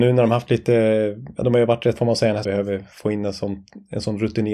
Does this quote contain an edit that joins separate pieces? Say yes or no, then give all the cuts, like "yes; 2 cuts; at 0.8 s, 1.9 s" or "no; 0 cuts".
yes; 2 cuts; at 2.0 s, 2.4 s